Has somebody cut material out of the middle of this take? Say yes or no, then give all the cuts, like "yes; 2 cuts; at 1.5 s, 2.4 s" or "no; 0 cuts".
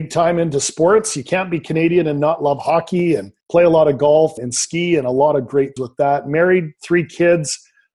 yes; 3 cuts; at 3.4 s, 4.4 s, 5.8 s